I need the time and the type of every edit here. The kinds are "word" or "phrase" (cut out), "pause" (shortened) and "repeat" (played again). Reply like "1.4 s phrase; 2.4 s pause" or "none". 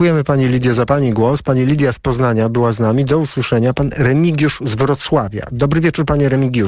none